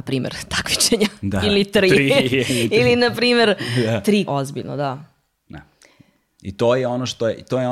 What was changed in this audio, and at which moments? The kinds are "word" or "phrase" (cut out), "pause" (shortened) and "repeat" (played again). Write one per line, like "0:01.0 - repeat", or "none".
0:04.3 - phrase